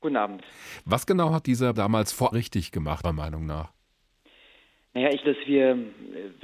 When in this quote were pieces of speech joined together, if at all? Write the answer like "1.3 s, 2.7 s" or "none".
1.7 s, 2.3 s, 3.0 s, 5.2 s